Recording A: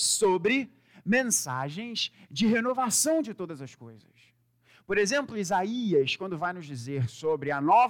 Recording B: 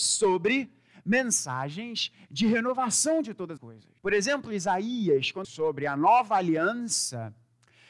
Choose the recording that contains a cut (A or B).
B